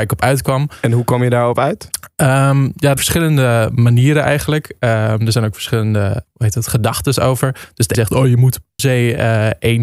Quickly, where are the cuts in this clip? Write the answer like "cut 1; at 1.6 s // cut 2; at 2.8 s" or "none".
cut 1; at 3.0 s // cut 2; at 6.2 s // cut 3; at 7.9 s // cut 4; at 8.8 s